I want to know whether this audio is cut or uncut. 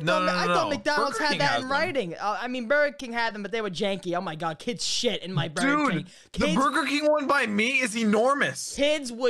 uncut